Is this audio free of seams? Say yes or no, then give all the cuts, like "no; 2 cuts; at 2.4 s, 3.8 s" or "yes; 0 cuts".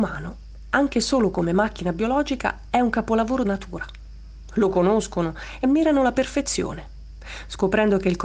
no; 2 cuts; at 3.5 s, 5.6 s